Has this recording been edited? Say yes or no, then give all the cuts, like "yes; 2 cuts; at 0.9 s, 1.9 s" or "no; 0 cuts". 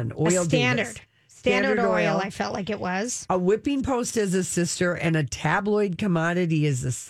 no; 0 cuts